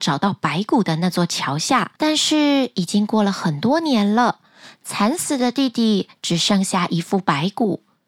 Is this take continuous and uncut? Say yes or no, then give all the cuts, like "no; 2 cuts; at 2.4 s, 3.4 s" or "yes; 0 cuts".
no; 1 cut; at 2.0 s